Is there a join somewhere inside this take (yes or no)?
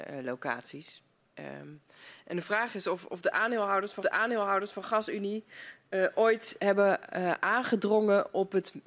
yes